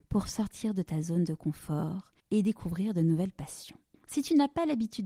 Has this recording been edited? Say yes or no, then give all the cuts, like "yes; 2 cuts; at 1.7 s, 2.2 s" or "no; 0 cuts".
yes; 2 cuts; at 2.2 s, 3.9 s